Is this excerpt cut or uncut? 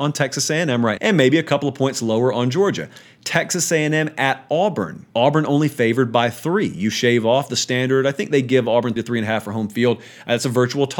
cut